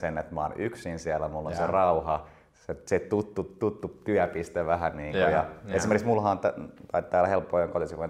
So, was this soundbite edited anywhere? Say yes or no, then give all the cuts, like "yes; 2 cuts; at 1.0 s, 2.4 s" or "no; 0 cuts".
no; 0 cuts